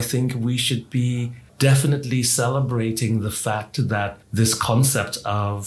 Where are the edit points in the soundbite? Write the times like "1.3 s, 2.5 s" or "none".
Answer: 1.5 s, 4.2 s